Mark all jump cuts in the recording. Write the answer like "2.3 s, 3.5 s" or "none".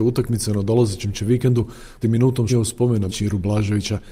2.0 s, 2.5 s, 3.1 s